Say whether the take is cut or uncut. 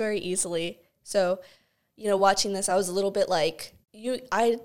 uncut